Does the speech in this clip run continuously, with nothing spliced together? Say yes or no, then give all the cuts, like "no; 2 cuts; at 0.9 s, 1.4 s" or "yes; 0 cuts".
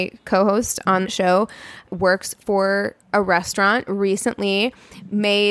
no; 4 cuts; at 1.0 s, 1.9 s, 3.0 s, 3.9 s